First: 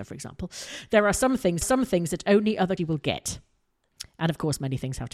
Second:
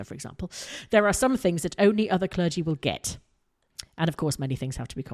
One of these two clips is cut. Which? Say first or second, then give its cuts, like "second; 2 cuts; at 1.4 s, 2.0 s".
first; 2 cuts; at 1.6 s, 2.8 s